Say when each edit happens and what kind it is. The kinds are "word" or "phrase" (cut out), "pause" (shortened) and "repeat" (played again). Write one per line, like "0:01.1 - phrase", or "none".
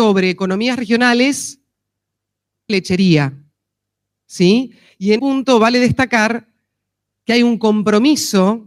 0:02.7 - word
0:05.2 - word

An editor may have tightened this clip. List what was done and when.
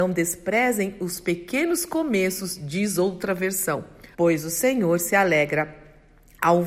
0:04.1 - pause

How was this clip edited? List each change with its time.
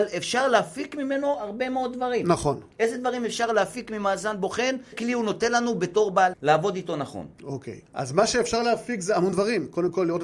0:04.9 - word
0:06.3 - word
0:07.3 - pause
0:07.9 - pause

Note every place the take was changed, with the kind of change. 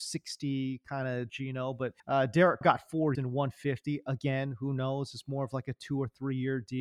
0:01.3 - phrase
0:02.0 - pause
0:02.6 - word
0:03.1 - word

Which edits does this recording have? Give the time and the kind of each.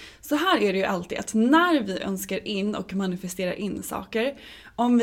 none

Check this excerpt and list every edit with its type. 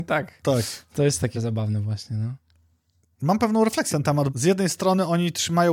0:01.3 - word
0:03.9 - word
0:04.3 - word

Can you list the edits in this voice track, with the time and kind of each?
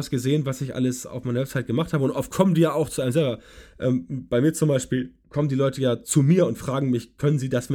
0:05.2 - pause

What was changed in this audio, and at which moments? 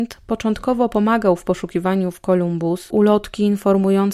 0:02.9 - word

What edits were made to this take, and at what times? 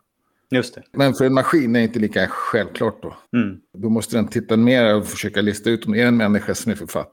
0:03.3 - pause

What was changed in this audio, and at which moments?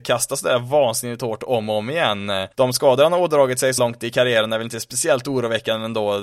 0:02.5 - pause
0:03.8 - word

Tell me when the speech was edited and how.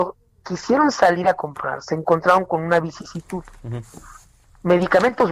none

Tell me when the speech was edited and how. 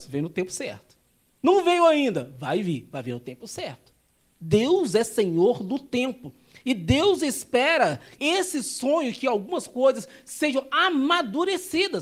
0:08.2 - word

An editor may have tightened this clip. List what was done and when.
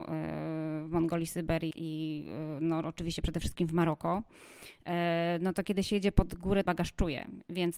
0:01.7 - word
0:06.7 - phrase

